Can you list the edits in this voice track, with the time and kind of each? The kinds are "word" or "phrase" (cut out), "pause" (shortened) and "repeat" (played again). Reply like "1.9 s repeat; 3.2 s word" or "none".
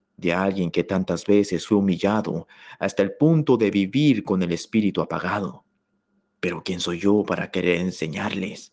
5.8 s pause